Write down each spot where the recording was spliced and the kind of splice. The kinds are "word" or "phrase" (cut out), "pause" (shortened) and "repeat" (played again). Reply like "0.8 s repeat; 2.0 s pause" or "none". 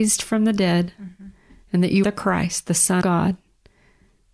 2.0 s word; 3.0 s word